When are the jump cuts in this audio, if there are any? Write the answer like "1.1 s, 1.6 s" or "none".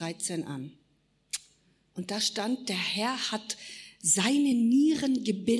none